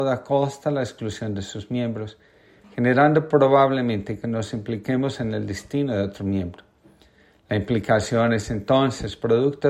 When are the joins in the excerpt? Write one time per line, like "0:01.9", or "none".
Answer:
none